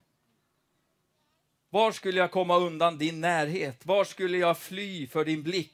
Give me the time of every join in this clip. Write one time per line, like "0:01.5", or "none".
none